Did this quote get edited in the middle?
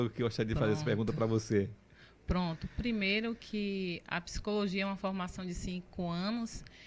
no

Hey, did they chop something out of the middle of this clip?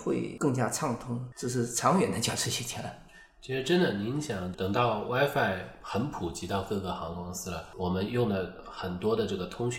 no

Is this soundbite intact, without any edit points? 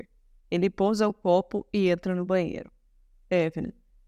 yes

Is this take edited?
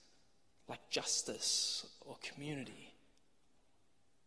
no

